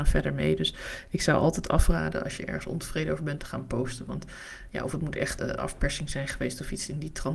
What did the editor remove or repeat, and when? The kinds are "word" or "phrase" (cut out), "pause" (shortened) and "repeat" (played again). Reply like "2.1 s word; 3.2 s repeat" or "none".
3.4 s phrase; 5.4 s word